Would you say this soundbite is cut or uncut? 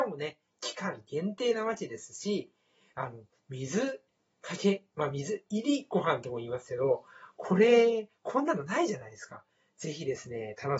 uncut